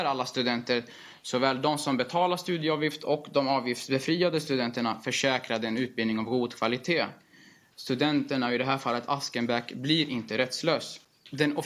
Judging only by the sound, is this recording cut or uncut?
uncut